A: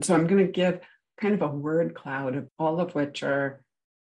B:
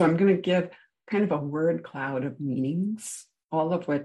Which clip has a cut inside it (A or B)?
A